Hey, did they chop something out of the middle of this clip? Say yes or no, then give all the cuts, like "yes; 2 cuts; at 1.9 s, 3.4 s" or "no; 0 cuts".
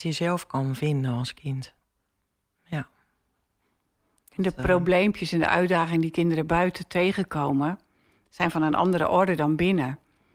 no; 0 cuts